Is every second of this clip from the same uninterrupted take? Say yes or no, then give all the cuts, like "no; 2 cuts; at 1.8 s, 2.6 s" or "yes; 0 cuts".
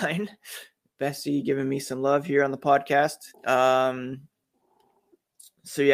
no; 1 cut; at 3.3 s